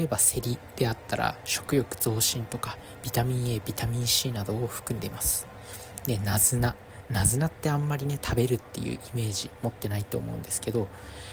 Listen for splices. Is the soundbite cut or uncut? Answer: uncut